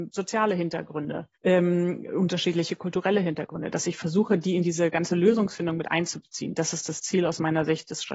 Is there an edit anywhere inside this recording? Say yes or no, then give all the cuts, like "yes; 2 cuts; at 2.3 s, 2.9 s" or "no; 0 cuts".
yes; 1 cut; at 1.4 s